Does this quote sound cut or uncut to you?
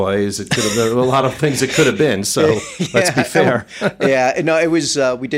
uncut